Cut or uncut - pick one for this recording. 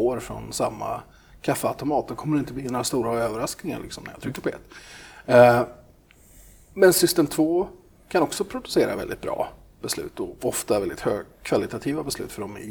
uncut